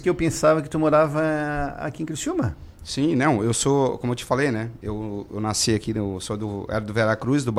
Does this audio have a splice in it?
no; 0 cuts

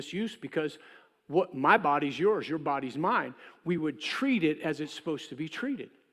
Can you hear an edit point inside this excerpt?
no; 0 cuts

